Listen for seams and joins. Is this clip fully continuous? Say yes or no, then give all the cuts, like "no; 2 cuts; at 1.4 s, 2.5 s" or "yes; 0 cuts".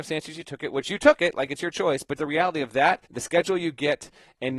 no; 2 cuts; at 2.2 s, 3.1 s